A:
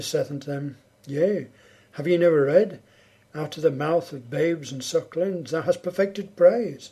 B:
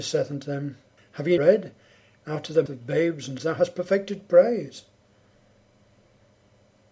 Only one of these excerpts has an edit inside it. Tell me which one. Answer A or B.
B